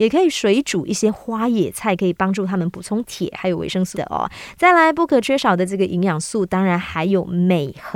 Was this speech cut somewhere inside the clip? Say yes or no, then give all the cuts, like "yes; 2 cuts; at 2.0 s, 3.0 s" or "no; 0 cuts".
yes; 1 cut; at 3.9 s